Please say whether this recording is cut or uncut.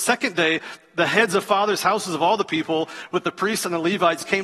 uncut